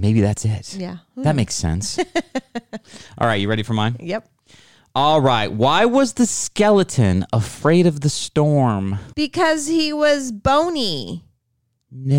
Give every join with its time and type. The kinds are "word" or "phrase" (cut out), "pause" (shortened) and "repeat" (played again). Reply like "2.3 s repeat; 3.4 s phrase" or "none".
9.1 s pause